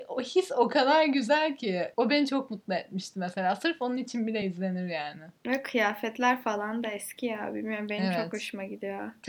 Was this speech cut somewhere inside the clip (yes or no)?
no